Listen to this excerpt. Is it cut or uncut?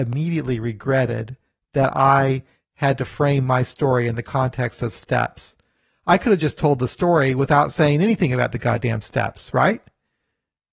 uncut